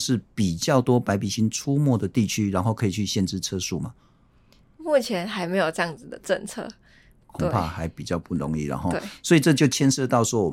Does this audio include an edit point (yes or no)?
no